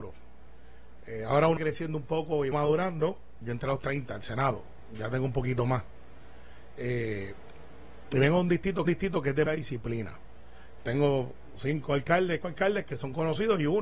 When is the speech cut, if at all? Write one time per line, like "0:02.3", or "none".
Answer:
0:01.6
0:02.5
0:08.9
0:09.5
0:10.8
0:12.4